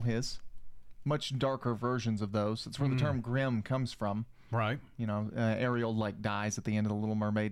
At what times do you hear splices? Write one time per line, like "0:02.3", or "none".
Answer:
none